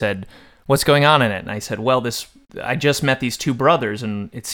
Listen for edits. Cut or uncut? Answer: uncut